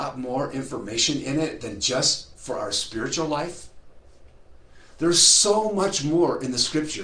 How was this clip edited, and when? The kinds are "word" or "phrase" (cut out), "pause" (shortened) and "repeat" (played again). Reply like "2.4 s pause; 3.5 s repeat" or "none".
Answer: none